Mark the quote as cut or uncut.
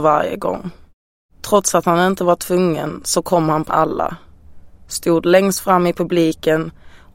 cut